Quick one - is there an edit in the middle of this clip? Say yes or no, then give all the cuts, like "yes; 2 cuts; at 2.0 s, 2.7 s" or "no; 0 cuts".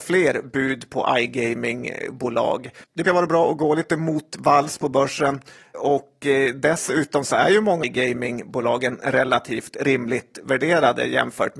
yes; 3 cuts; at 3.1 s, 5.7 s, 7.8 s